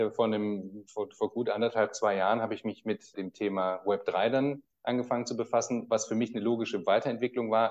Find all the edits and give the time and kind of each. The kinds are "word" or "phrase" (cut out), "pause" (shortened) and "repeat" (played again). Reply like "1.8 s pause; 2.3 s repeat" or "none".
3.1 s word